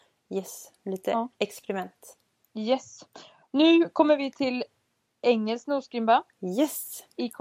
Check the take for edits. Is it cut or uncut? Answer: uncut